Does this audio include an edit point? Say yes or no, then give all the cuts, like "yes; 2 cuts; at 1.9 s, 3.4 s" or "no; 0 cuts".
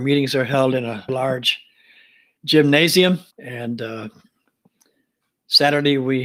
yes; 2 cuts; at 1.1 s, 3.3 s